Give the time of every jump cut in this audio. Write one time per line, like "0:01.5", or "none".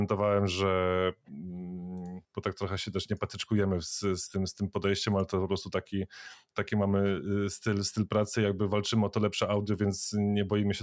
0:02.2